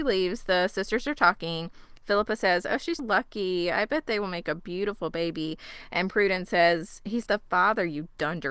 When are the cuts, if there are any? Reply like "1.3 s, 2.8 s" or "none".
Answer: 3.0 s, 7.3 s